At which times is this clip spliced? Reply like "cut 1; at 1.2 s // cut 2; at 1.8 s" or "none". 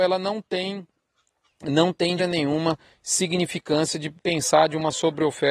cut 1; at 2.2 s // cut 2; at 4.2 s